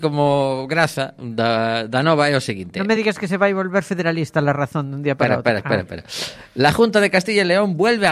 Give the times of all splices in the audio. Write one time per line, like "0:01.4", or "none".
none